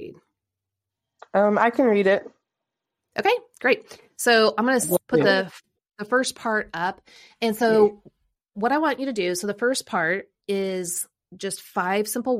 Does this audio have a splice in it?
no; 0 cuts

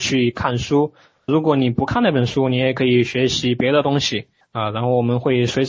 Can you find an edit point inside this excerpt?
yes; 2 cuts; at 1.3 s, 4.4 s

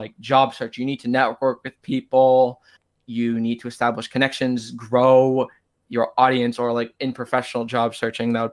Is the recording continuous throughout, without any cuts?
yes; 0 cuts

